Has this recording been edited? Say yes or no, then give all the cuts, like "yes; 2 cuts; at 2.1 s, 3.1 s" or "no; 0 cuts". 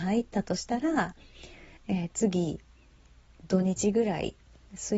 no; 0 cuts